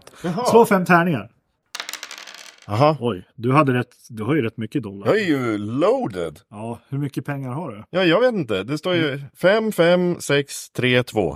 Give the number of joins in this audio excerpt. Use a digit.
1